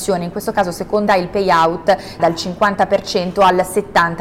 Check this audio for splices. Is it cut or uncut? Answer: cut